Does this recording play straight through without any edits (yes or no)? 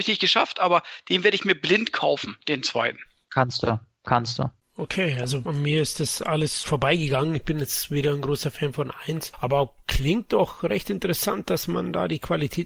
yes